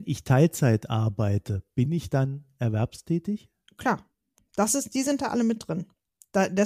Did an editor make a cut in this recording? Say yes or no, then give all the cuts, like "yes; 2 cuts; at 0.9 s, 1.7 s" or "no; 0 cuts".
no; 0 cuts